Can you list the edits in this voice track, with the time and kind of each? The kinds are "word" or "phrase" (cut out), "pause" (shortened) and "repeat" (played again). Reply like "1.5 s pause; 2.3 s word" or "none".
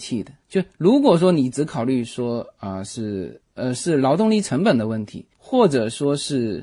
5.3 s pause